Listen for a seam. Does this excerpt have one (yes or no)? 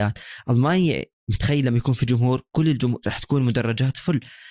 no